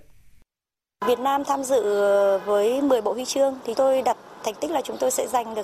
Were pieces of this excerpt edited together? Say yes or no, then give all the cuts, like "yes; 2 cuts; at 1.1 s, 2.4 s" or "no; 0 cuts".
yes; 1 cut; at 3.7 s